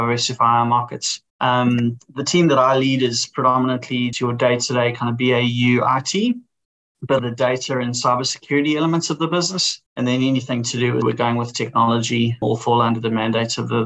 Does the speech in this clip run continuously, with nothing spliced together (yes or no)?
no